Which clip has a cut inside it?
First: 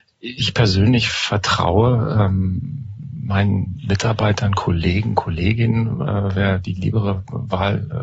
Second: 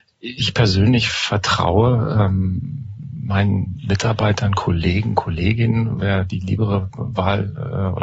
second; 1 cut; at 6.0 s

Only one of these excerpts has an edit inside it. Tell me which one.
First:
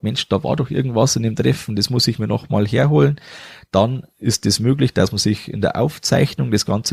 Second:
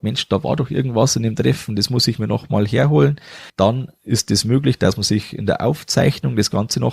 second; 1 cut; at 3.5 s

